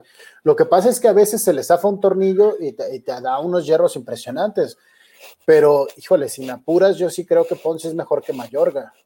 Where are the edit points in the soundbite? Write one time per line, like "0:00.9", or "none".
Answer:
none